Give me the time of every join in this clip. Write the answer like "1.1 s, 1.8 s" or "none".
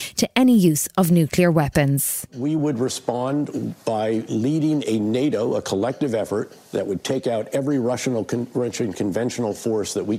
none